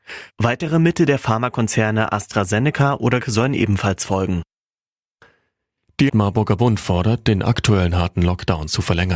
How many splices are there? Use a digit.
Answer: 2